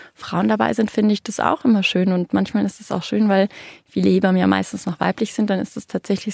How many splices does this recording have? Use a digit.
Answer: 0